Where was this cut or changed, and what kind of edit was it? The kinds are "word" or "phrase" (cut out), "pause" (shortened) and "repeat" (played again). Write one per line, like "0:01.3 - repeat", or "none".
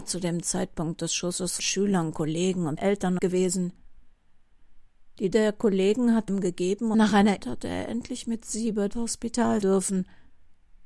0:01.6 - word
0:02.8 - word
0:03.2 - word
0:05.3 - word
0:06.3 - word
0:06.9 - word
0:07.4 - word
0:08.9 - word
0:09.6 - word